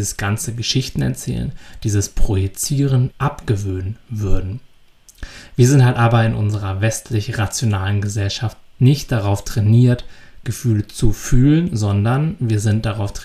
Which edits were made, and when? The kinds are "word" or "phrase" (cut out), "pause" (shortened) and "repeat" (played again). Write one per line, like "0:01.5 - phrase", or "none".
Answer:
0:03.1 - word